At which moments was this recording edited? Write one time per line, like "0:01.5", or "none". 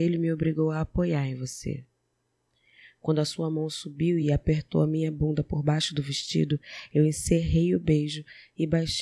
none